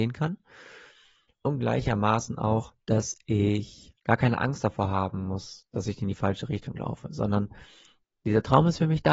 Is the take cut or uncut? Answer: cut